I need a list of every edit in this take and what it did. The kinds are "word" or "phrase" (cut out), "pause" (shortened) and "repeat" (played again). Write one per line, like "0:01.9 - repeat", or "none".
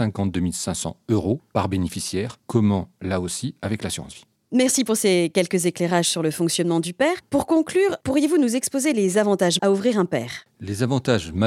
0:09.6 - word